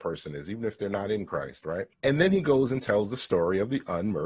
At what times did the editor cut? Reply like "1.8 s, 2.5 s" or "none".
1.9 s